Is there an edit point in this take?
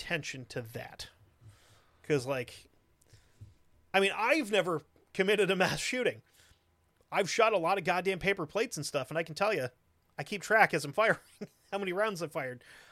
no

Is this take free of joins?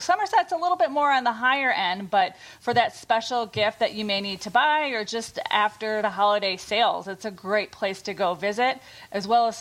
yes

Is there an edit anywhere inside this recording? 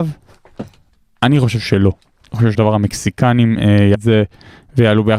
yes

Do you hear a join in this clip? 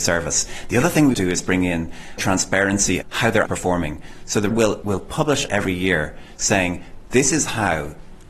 yes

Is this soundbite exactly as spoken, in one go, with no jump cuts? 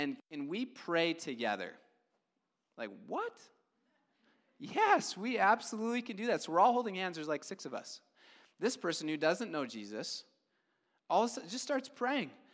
yes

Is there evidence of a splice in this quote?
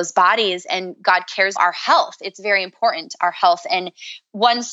yes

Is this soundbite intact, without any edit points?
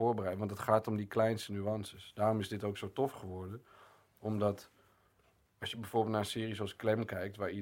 yes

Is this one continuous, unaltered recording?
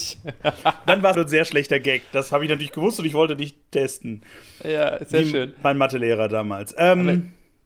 no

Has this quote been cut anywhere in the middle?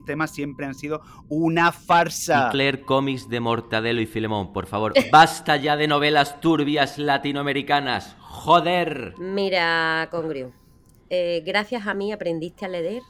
yes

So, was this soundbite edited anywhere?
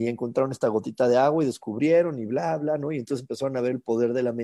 no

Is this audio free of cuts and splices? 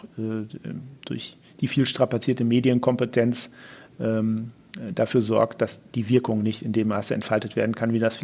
yes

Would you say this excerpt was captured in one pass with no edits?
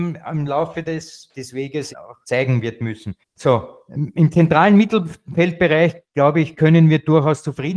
no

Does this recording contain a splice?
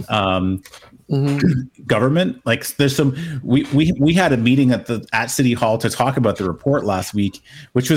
no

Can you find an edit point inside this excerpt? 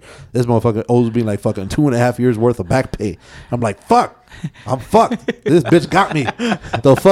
no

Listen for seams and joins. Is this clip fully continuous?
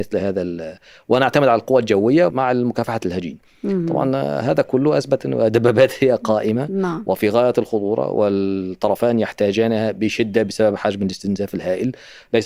no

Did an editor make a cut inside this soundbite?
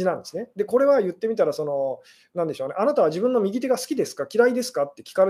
no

